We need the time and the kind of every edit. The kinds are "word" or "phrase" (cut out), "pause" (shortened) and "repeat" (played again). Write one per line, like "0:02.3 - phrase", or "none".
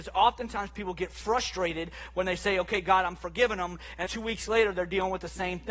0:04.1 - word